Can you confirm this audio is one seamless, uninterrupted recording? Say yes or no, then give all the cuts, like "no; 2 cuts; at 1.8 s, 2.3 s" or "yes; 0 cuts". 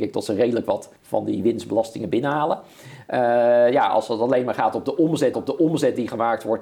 no; 2 cuts; at 1.0 s, 5.3 s